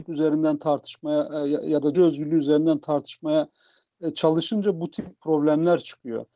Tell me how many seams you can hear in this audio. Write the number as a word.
one